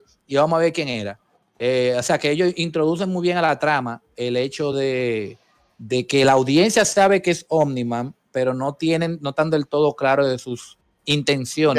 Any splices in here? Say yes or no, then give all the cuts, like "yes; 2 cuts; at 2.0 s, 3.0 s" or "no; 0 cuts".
no; 0 cuts